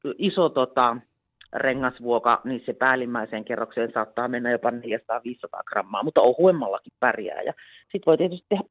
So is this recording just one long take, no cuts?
yes; 0 cuts

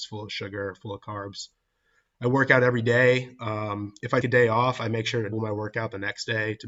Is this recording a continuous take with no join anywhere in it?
no; 2 cuts; at 4.2 s, 5.3 s

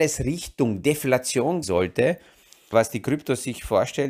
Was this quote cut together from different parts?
yes; 2 cuts; at 1.6 s, 2.7 s

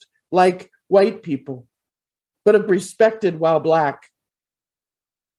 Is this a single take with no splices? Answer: no; 1 cut; at 2.7 s

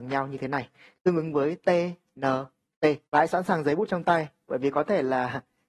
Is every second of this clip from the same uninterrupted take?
no; 1 cut; at 3.0 s

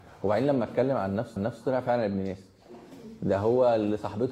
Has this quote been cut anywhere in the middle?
yes; 1 cut; at 1.4 s

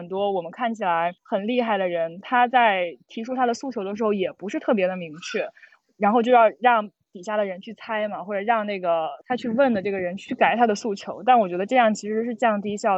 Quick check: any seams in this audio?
yes; 1 cut; at 1.2 s

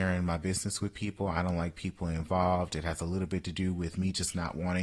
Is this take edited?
no; 0 cuts

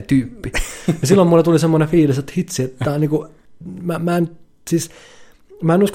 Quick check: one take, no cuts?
yes; 0 cuts

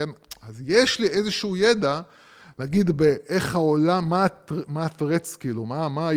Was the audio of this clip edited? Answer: no; 0 cuts

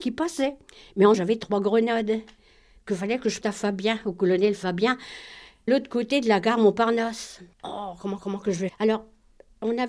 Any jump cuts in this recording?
yes; 6 cuts; at 1.1 s, 3.4 s, 5.7 s, 7.5 s, 8.2 s, 8.7 s

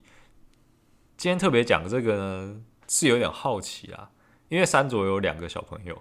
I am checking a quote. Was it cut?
no; 0 cuts

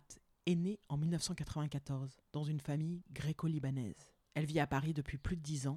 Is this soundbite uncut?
no; 2 cuts; at 2.3 s, 4.2 s

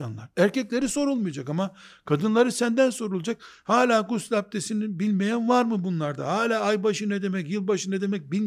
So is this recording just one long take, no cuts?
yes; 0 cuts

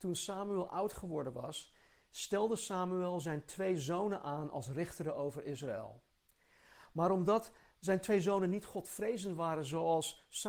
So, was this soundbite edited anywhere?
no; 0 cuts

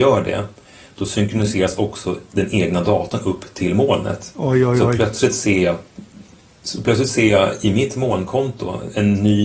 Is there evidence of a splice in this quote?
no; 0 cuts

